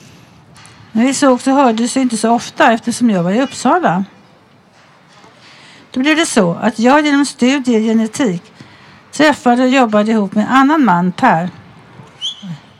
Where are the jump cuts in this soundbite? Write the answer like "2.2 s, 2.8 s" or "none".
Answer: none